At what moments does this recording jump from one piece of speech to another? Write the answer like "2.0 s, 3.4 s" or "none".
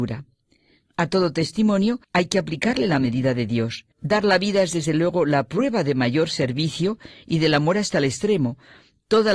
2.0 s, 3.9 s